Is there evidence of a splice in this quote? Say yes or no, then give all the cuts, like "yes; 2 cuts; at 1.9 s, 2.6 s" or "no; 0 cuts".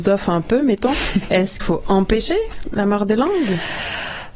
yes; 1 cut; at 1.6 s